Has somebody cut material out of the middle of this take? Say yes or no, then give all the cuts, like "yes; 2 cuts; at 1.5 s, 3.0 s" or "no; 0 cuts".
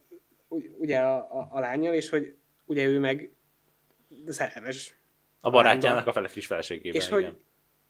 no; 0 cuts